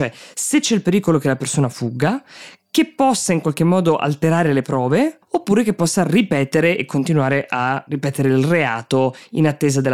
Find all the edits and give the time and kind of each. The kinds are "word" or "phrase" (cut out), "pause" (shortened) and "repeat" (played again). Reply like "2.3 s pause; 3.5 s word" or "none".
5.2 s pause